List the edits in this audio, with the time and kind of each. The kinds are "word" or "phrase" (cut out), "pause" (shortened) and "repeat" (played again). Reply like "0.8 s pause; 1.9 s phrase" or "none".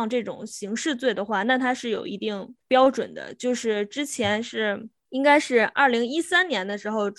2.6 s pause